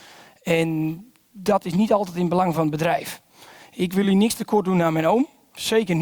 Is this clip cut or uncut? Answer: uncut